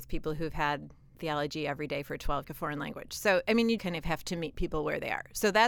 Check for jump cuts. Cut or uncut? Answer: cut